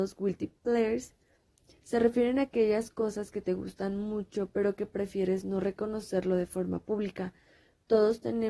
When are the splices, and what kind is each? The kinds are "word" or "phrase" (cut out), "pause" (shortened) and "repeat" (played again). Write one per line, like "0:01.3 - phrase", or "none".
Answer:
none